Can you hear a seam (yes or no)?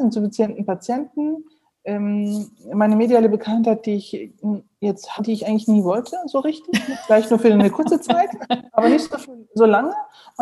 yes